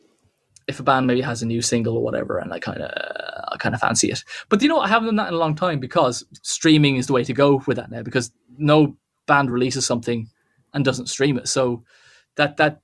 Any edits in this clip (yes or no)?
no